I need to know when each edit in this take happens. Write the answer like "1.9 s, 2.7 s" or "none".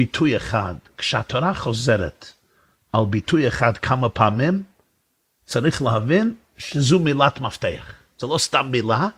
none